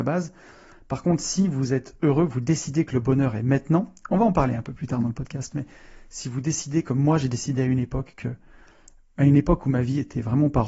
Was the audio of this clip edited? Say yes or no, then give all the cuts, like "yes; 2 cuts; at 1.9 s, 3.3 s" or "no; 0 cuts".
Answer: no; 0 cuts